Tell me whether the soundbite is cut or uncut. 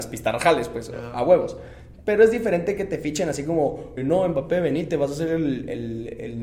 cut